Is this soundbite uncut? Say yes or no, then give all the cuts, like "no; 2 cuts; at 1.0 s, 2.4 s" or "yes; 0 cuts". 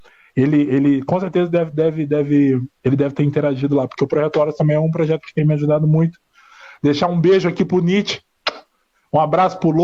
yes; 0 cuts